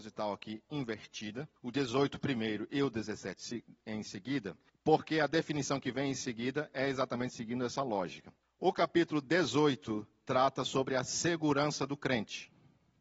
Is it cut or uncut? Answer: cut